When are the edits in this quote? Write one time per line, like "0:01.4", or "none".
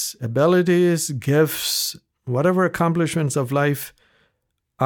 none